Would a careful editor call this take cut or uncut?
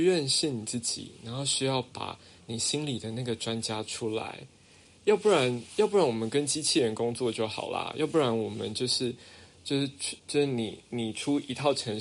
cut